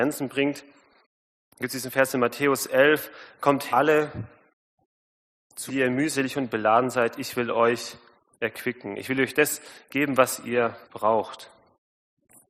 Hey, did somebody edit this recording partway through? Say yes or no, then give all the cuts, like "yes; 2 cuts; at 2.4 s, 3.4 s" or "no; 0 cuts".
yes; 3 cuts; at 3.7 s, 5.7 s, 10.8 s